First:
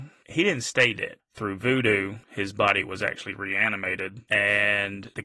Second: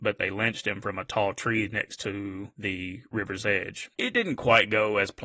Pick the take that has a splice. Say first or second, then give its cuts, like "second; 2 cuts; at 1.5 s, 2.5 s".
first; 1 cut; at 2.2 s